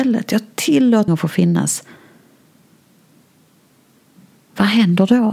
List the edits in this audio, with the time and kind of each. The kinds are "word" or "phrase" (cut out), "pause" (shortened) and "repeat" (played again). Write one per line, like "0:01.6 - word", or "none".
0:01.1 - word